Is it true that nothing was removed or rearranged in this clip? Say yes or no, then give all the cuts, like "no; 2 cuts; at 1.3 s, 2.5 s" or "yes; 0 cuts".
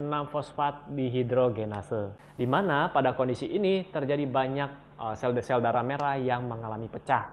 yes; 0 cuts